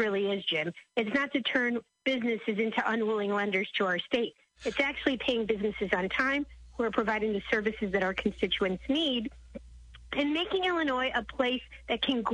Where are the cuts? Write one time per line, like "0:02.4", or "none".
none